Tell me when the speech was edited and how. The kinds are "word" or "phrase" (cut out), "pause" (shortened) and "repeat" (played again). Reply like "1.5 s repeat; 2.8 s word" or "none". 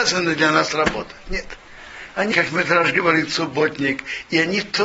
2.3 s word